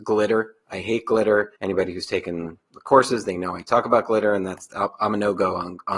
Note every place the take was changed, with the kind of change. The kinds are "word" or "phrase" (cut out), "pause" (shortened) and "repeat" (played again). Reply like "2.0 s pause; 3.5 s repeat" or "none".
1.5 s pause